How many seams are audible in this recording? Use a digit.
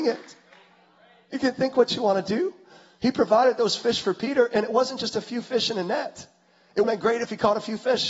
1